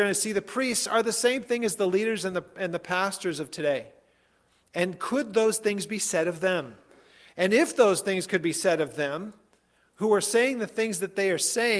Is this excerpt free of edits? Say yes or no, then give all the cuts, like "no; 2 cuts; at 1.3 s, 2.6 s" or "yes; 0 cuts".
yes; 0 cuts